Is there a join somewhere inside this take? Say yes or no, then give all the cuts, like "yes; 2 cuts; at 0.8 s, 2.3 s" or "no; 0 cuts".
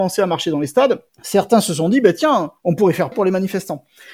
yes; 3 cuts; at 1.1 s, 2.6 s, 3.1 s